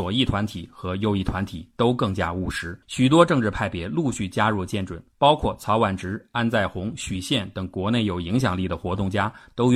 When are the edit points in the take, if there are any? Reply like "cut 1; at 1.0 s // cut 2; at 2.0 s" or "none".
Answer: cut 1; at 2.8 s // cut 2; at 5.1 s